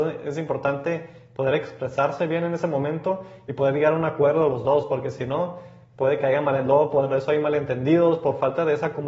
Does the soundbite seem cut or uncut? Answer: uncut